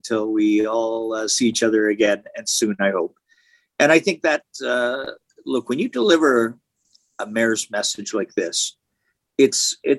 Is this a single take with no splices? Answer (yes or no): yes